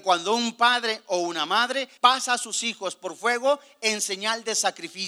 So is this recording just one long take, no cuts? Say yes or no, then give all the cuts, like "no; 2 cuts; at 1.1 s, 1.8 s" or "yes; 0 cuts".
no; 1 cut; at 2.0 s